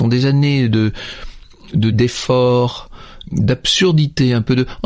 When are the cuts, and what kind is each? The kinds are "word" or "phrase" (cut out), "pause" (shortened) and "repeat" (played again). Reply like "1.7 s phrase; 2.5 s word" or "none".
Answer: 1.9 s word